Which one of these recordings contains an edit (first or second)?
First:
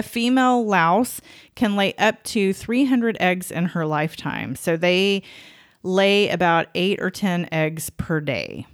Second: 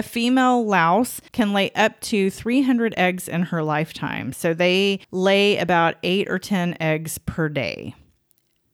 second